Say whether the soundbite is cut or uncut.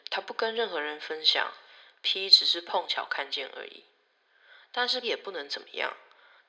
cut